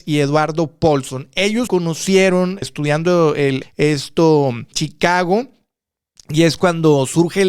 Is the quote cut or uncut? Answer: cut